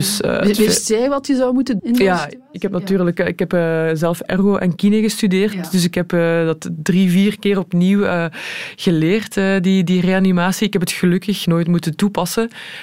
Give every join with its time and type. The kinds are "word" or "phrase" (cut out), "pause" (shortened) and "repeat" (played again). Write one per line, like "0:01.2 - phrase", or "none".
0:01.8 - word
0:11.5 - word